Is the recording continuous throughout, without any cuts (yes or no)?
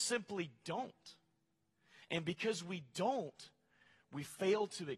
yes